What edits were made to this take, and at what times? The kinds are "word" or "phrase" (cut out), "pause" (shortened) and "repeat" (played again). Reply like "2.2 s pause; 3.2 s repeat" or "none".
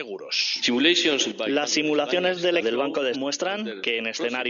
2.6 s word; 3.1 s word